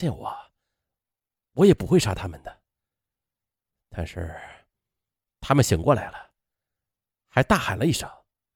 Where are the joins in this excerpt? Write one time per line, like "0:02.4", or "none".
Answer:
none